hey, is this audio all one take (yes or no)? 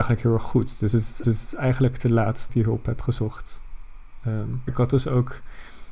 no